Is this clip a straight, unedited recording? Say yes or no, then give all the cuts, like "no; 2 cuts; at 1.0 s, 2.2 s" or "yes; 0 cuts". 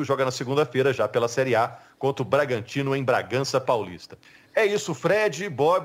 no; 1 cut; at 4.2 s